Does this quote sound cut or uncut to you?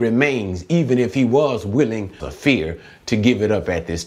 cut